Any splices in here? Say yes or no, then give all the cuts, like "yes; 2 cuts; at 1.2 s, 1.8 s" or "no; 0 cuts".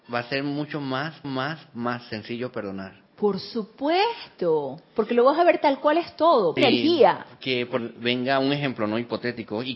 yes; 4 cuts; at 1.2 s, 3.1 s, 6.6 s, 7.8 s